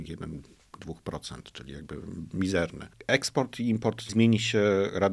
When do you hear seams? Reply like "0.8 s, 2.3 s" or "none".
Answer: 4.1 s